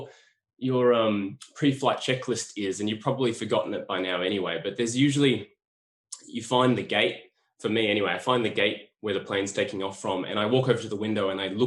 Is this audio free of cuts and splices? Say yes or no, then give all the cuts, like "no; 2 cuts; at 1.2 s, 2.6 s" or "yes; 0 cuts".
yes; 0 cuts